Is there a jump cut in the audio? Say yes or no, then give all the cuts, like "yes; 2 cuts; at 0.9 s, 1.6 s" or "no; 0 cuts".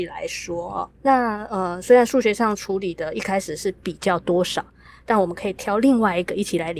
yes; 1 cut; at 0.9 s